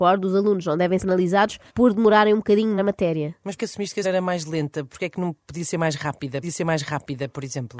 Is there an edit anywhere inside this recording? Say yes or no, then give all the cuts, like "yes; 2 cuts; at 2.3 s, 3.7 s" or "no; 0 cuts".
yes; 6 cuts; at 1.0 s, 1.7 s, 2.8 s, 3.6 s, 4.0 s, 6.4 s